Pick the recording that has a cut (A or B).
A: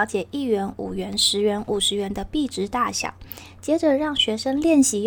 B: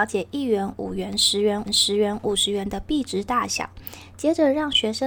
B